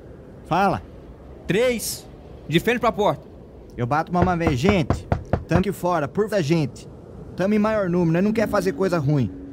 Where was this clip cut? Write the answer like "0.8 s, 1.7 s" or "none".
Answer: 5.6 s, 6.3 s